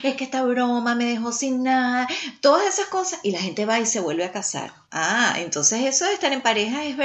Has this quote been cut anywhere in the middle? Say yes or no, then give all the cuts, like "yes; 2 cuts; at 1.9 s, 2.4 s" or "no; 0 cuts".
yes; 1 cut; at 4.9 s